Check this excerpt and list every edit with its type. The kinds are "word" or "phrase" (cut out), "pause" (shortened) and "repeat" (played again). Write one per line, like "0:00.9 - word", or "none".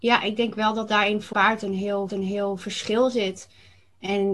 0:01.3 - word
0:02.1 - repeat